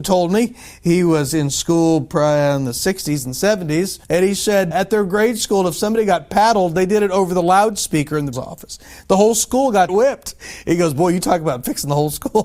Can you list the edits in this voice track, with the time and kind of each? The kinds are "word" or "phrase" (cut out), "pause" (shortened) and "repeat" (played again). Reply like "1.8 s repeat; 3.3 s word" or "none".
4.0 s pause; 4.7 s word; 8.3 s word; 9.9 s phrase